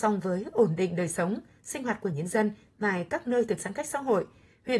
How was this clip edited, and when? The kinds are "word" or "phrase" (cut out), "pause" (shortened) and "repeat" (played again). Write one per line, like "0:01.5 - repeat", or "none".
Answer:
0:03.6 - word